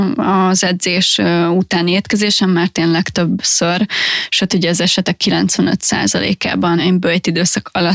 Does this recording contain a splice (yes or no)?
yes